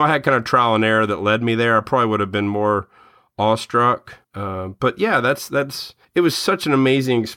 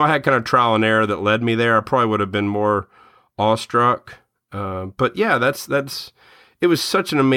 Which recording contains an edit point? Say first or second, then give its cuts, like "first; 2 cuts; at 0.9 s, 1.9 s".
first; 2 cuts; at 4.2 s, 6.0 s